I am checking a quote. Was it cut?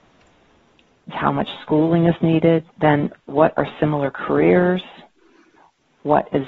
yes; 2 cuts; at 1.1 s, 2.7 s

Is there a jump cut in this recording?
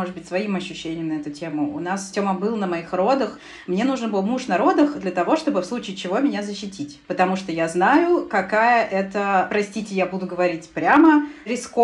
yes; 1 cut; at 7.0 s

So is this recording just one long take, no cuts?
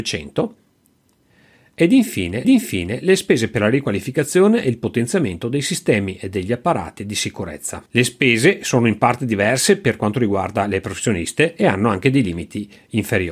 no; 2 cuts; at 2.4 s, 7.9 s

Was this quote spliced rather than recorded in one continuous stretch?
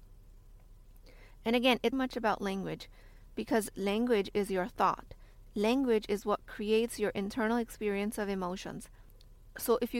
yes; 1 cut; at 1.9 s

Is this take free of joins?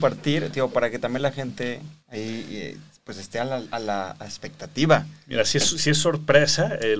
no; 1 cut; at 2.0 s

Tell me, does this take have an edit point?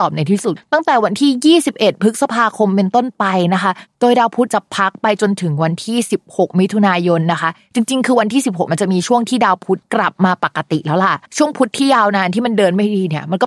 yes; 1 cut; at 11.3 s

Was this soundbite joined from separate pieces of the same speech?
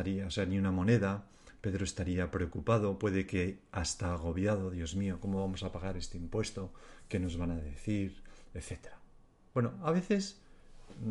no; 0 cuts

